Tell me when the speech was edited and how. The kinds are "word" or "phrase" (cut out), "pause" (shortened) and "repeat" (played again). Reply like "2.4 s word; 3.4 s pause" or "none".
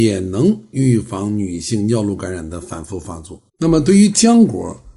3.5 s pause